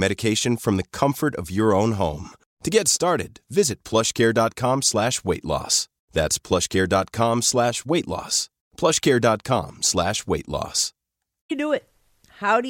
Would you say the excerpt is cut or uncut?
uncut